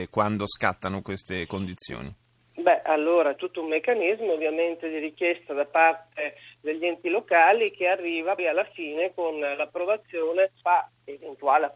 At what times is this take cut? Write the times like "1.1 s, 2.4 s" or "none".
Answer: 3.4 s, 8.4 s, 10.6 s